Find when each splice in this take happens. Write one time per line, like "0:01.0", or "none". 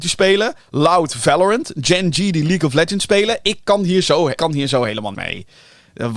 0:04.4
0:05.1